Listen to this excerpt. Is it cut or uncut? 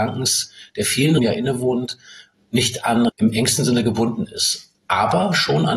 cut